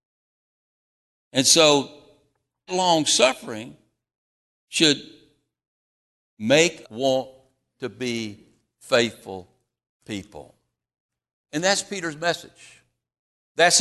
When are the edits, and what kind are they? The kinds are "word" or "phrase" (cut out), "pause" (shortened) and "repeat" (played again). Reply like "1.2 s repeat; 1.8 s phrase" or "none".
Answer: 2.7 s word; 6.8 s word

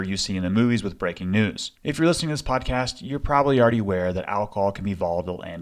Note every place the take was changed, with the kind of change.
1.7 s pause

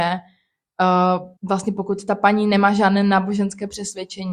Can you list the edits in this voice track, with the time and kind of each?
1.4 s pause

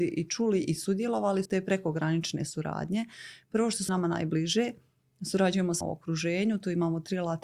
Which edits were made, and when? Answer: 1.5 s word; 3.9 s word; 5.8 s word

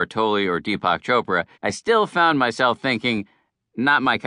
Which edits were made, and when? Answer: 1.5 s pause

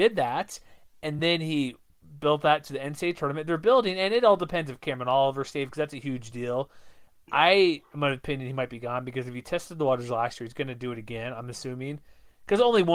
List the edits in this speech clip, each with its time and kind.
none

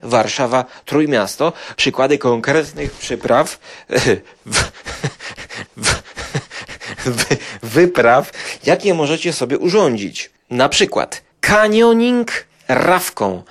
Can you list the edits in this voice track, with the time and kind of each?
1.7 s phrase; 5.6 s repeat; 11.3 s pause

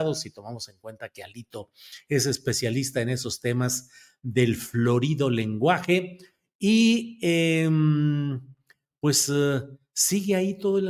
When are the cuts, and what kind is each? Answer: none

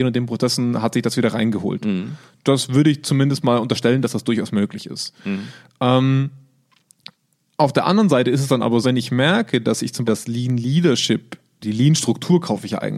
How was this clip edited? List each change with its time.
8.8 s word; 10.1 s word; 11.6 s word

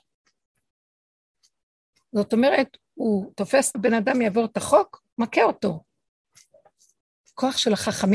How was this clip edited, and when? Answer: 3.7 s phrase

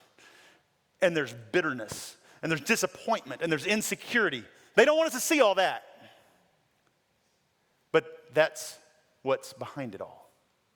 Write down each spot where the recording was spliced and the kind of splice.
none

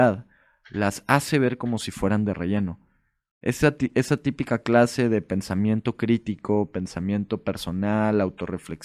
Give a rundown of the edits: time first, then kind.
none

